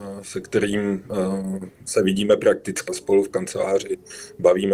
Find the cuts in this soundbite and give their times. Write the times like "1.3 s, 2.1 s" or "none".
2.9 s